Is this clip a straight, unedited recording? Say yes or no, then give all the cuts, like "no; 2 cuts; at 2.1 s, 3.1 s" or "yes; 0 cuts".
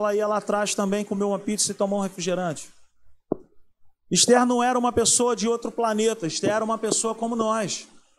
yes; 0 cuts